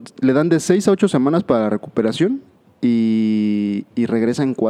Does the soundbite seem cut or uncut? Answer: uncut